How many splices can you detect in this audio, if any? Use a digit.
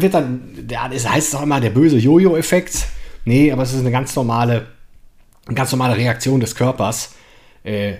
0